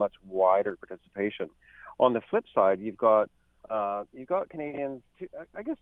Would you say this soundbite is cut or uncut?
uncut